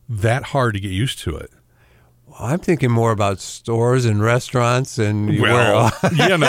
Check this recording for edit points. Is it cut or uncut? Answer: uncut